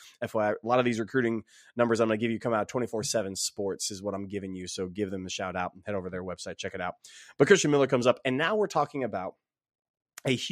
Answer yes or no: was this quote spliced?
no